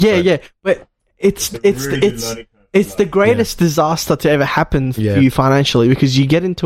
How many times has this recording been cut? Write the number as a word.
zero